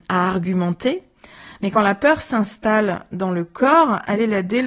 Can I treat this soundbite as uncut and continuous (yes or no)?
yes